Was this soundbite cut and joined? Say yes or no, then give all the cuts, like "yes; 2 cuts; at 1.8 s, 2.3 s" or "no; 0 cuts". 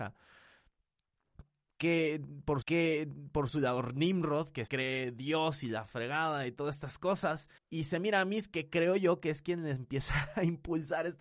yes; 3 cuts; at 2.6 s, 4.7 s, 7.6 s